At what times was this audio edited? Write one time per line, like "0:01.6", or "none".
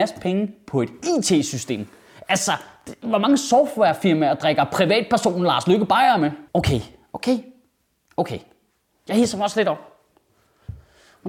none